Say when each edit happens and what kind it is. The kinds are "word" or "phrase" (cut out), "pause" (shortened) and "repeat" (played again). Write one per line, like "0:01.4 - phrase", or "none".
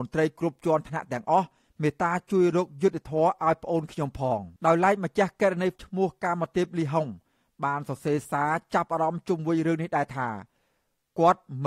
0:04.6 - pause
0:05.8 - word